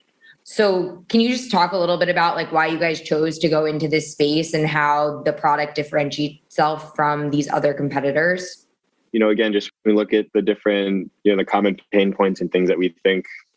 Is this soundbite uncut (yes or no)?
yes